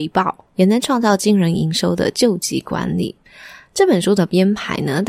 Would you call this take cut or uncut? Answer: uncut